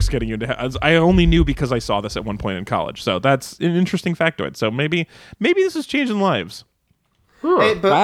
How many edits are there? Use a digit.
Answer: 0